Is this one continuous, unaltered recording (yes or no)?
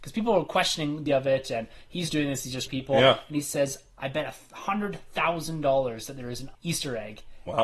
no